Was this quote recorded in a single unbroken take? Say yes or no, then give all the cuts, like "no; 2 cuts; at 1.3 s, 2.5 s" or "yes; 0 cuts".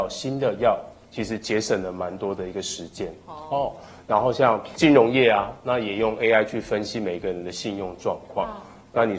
yes; 0 cuts